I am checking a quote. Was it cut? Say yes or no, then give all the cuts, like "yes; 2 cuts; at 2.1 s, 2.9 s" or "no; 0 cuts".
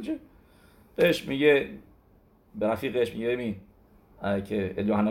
no; 0 cuts